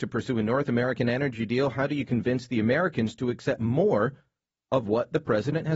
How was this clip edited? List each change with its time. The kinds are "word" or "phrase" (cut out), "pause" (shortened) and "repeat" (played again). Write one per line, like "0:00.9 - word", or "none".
none